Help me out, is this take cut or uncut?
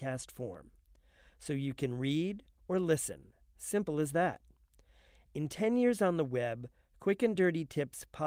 uncut